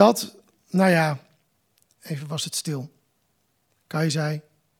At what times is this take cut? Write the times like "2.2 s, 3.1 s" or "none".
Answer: none